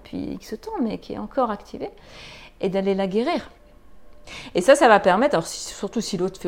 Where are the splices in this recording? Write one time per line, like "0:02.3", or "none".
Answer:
none